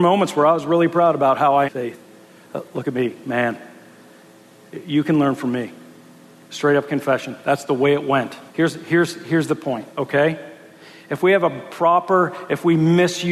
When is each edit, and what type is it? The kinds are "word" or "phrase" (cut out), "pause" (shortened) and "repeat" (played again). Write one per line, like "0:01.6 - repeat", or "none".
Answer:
0:01.6 - phrase
0:08.5 - pause
0:09.9 - pause